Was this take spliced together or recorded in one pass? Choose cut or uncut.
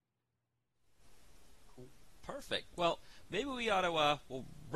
uncut